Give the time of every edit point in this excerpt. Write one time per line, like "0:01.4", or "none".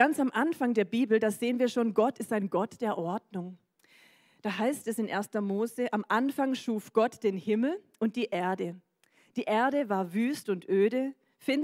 none